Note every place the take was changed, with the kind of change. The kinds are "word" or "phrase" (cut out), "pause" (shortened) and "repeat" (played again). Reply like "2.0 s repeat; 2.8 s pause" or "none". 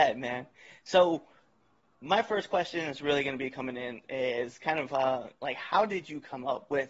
none